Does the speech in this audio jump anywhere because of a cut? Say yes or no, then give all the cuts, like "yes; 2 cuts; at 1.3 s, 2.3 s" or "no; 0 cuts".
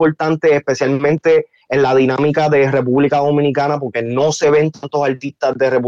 no; 0 cuts